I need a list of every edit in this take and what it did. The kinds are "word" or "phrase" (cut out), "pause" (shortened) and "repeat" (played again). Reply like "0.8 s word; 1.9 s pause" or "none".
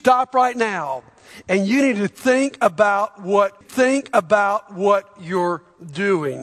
3.6 s repeat